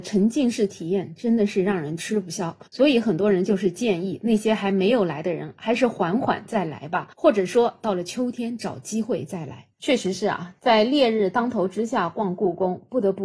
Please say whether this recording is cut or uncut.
cut